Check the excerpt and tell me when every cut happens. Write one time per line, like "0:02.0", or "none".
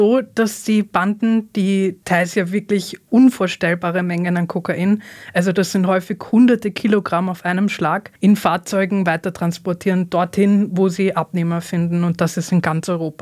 0:02.0
0:08.2